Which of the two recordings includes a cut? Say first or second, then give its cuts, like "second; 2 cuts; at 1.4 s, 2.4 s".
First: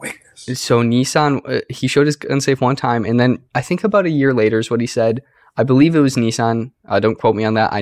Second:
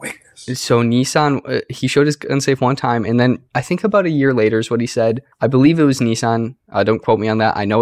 second; 1 cut; at 5.3 s